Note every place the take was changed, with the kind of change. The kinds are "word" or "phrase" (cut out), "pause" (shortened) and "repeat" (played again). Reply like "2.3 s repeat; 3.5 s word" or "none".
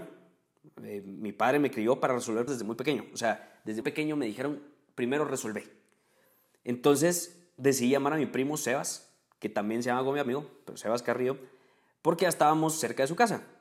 2.5 s word; 3.8 s word